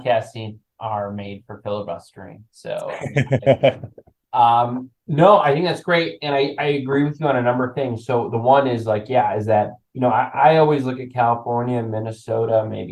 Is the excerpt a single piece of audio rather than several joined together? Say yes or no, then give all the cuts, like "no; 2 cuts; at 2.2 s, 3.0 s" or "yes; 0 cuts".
no; 1 cut; at 9.8 s